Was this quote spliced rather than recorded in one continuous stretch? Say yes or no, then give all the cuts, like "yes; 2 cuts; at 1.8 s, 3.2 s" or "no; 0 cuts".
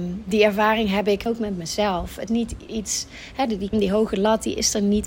yes; 4 cuts; at 1.3 s, 2.3 s, 2.7 s, 3.7 s